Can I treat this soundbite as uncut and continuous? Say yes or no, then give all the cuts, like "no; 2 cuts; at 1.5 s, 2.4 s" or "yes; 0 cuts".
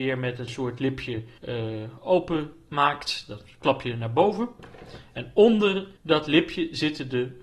no; 2 cuts; at 1.4 s, 6.0 s